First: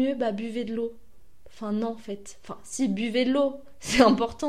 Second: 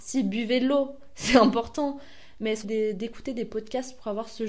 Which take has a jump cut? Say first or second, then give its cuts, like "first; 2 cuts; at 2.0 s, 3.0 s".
second; 1 cut; at 2.6 s